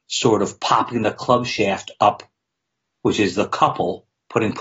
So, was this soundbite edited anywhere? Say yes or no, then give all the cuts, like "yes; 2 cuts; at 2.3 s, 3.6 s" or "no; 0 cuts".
no; 0 cuts